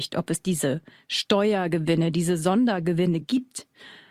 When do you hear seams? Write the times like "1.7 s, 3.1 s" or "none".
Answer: none